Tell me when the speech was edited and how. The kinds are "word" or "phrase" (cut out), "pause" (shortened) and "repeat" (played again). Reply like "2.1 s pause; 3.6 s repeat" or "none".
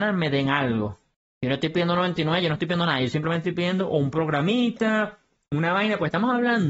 1.1 s pause